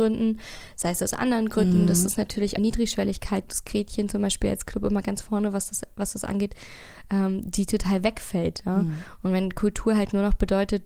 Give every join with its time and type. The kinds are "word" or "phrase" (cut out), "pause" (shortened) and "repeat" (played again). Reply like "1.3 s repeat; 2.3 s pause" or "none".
2.6 s phrase; 3.4 s word